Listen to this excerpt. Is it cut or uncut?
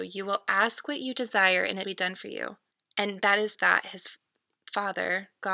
cut